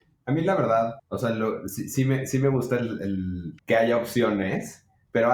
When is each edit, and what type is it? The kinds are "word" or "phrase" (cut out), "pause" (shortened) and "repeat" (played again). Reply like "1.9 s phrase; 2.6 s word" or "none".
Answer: 1.0 s pause; 3.6 s pause